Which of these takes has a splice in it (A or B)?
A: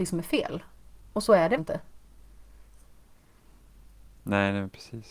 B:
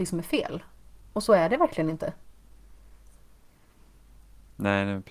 A